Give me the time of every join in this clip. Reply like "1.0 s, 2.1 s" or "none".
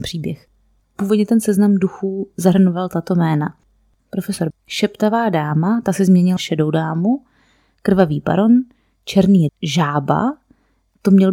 4.5 s, 6.4 s, 9.5 s